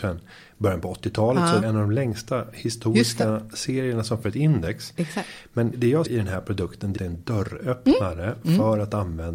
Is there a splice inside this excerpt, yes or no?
yes